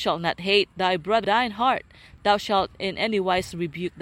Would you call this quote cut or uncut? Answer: cut